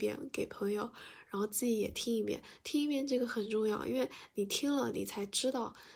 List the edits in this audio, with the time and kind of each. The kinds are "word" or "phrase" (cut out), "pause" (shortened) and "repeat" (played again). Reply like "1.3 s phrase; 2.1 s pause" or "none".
none